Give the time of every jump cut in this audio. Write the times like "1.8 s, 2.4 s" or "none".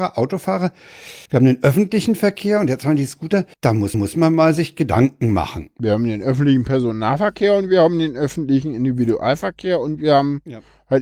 1.3 s, 3.5 s, 3.9 s